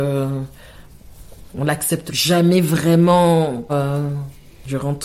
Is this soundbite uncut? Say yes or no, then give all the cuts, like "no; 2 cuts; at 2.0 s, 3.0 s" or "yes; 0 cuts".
no; 2 cuts; at 2.1 s, 3.7 s